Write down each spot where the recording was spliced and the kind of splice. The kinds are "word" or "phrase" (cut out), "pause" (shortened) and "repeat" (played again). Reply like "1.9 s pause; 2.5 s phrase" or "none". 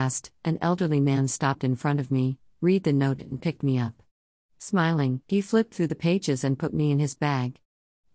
none